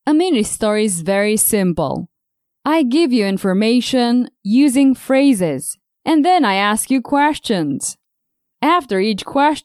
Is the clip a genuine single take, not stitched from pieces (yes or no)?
yes